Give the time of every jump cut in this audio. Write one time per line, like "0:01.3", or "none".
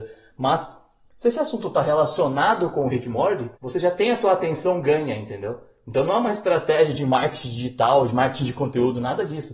0:03.5